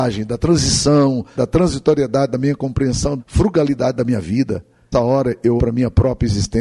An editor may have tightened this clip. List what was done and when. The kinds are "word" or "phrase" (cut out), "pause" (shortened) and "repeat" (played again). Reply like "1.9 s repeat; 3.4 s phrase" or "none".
1.4 s word; 3.2 s word; 4.9 s word; 5.6 s word